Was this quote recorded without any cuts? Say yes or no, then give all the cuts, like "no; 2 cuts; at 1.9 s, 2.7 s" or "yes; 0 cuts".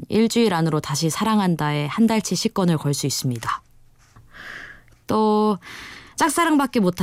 yes; 0 cuts